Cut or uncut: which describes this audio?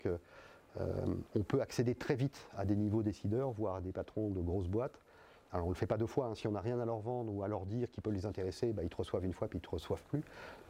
uncut